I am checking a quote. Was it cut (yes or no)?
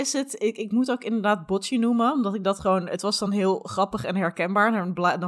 no